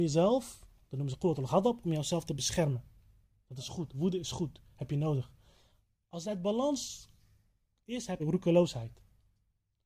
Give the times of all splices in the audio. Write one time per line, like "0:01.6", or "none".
0:08.2